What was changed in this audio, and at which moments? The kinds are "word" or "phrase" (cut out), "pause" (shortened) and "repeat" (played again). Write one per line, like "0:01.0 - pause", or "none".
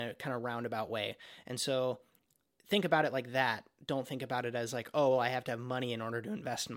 none